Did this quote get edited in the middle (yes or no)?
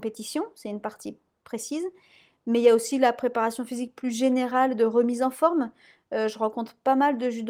no